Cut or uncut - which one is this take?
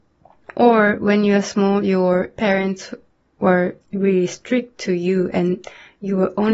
uncut